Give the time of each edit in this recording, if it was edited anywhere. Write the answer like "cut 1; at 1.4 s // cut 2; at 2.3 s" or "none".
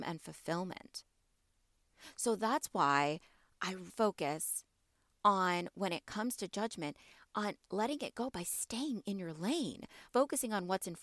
cut 1; at 3.9 s // cut 2; at 10.1 s